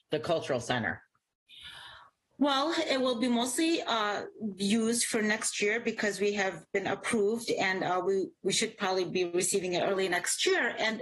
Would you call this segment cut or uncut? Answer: uncut